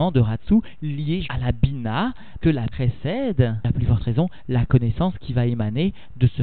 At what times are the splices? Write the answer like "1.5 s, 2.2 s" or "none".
1.2 s, 2.4 s, 2.7 s